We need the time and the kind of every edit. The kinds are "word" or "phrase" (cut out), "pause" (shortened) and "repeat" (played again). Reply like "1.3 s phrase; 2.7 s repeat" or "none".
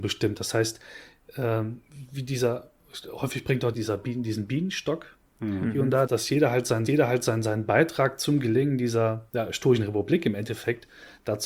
3.7 s word; 6.1 s word; 6.9 s repeat; 9.3 s pause

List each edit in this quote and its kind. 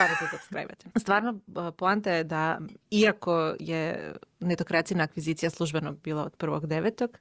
0.9 s pause; 2.8 s pause

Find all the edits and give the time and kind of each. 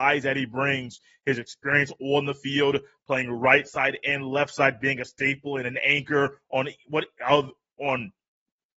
none

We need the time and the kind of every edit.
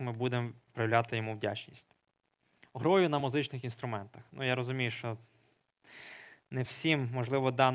none

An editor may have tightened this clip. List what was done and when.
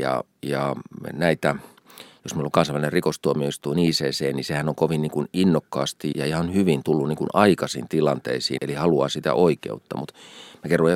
6.1 s word; 8.6 s word

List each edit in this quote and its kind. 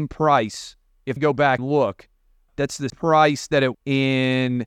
1.2 s word; 1.6 s word; 2.5 s word; 2.9 s word; 3.7 s word

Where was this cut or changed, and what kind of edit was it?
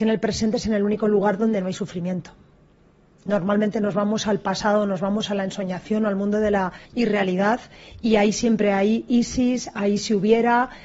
6.8 s pause

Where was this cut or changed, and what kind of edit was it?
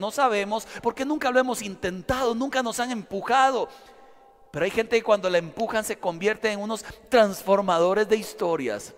none

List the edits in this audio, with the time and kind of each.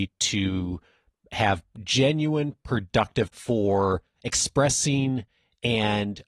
3.3 s word

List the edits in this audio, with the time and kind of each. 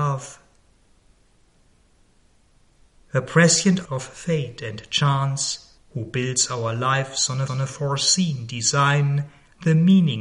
3.8 s word; 5.8 s pause; 7.5 s repeat

